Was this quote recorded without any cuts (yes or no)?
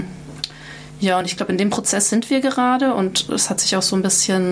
yes